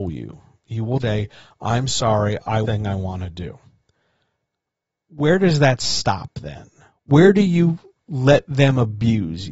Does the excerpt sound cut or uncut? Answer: cut